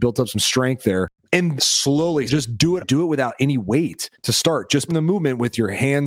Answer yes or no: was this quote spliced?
yes